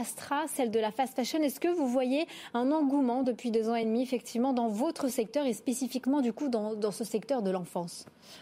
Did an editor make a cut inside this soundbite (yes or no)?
no